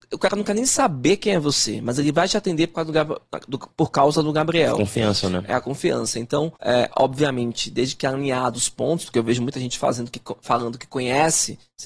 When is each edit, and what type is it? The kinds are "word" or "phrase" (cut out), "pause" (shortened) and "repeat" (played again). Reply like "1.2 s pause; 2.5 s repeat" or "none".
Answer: 6.6 s pause